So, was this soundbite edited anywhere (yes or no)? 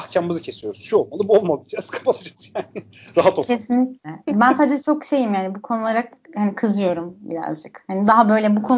no